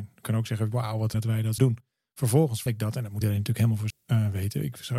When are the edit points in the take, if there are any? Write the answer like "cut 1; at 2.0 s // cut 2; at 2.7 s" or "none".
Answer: cut 1; at 1.1 s // cut 2; at 1.6 s // cut 3; at 2.7 s // cut 4; at 3.2 s // cut 5; at 3.9 s